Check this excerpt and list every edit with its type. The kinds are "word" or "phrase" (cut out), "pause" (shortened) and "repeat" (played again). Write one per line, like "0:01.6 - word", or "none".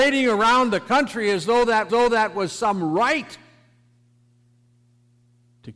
0:01.9 - repeat